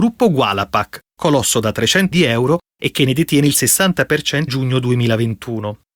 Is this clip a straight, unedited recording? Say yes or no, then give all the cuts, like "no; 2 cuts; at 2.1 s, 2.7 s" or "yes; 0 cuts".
no; 2 cuts; at 2.1 s, 4.5 s